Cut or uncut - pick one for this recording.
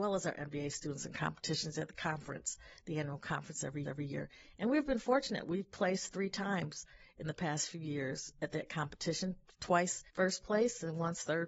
cut